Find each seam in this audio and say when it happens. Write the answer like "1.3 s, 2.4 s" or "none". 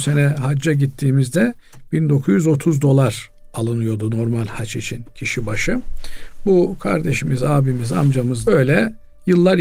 8.4 s